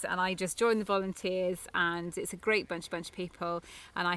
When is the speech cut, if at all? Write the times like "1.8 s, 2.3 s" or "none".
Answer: 2.9 s